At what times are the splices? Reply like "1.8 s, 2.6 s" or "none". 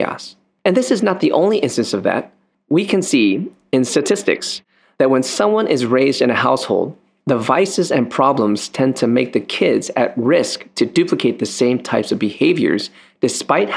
none